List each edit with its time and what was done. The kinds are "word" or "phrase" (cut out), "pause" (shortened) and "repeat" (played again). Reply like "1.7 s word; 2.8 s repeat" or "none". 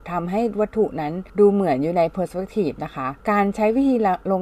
1.3 s pause; 3.2 s pause